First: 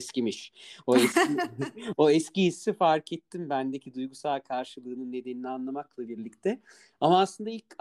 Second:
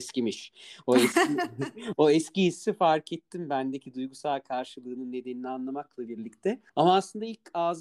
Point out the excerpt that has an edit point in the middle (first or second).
second